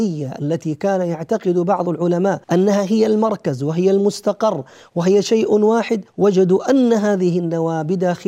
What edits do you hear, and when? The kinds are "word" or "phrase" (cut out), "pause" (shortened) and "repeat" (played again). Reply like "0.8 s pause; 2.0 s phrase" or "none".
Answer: 2.4 s pause; 6.1 s pause